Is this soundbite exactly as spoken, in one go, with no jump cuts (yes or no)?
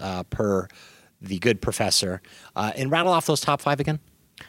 yes